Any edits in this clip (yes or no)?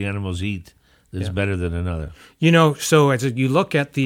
no